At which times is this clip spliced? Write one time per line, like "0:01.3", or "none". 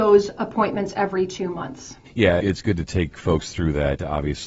0:02.1